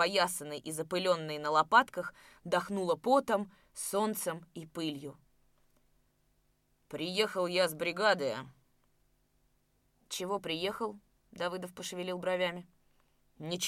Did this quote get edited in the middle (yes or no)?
no